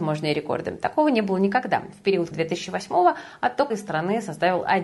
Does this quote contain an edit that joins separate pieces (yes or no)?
yes